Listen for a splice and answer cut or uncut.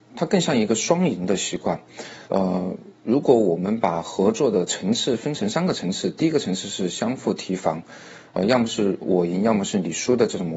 cut